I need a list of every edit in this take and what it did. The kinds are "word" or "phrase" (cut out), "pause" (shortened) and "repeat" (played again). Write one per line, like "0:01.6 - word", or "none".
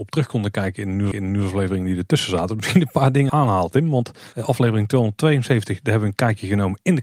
0:01.1 - repeat
0:03.3 - word
0:04.3 - pause